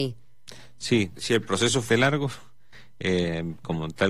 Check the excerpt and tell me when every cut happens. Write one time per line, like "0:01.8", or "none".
0:01.2
0:01.9